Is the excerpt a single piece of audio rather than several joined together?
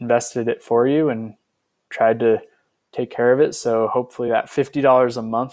yes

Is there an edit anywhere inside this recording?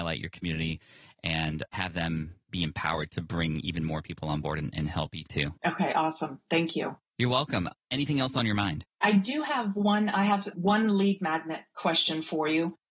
yes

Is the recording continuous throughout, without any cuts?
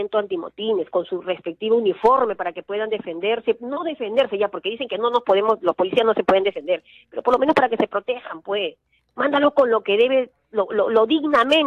yes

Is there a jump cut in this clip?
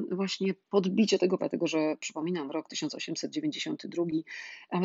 yes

